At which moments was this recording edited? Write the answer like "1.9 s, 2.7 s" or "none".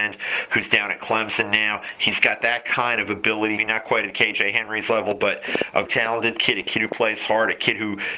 3.6 s, 5.9 s